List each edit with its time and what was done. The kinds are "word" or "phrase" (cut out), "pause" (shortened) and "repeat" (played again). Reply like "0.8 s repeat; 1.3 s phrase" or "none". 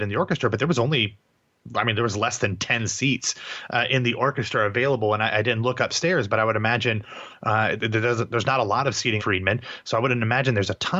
7.8 s word; 9.2 s phrase